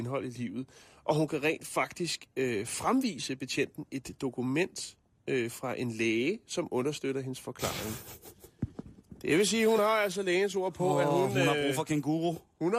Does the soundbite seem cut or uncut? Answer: uncut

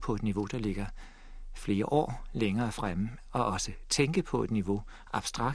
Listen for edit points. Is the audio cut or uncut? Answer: uncut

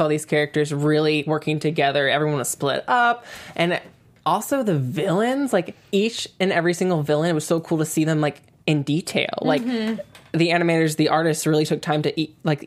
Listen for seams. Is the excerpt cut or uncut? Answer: uncut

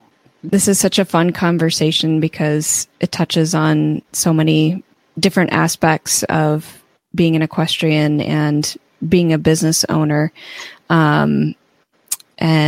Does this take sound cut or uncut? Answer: uncut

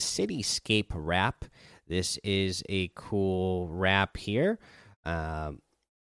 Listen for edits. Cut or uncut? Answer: uncut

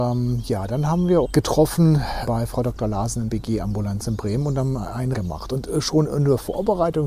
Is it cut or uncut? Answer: cut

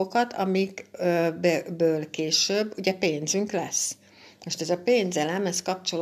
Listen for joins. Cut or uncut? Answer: uncut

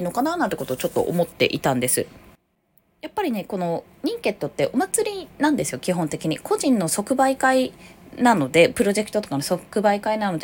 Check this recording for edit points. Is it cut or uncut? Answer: uncut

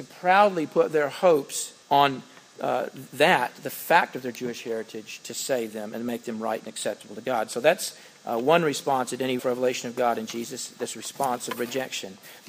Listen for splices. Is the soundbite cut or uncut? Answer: cut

